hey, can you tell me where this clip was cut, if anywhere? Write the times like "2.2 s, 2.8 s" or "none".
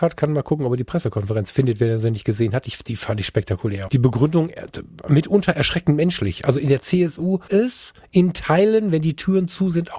3.9 s, 7.5 s

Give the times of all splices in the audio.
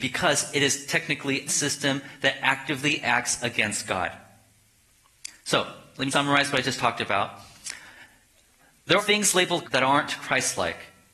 1.5 s, 6.1 s, 9.0 s, 9.6 s

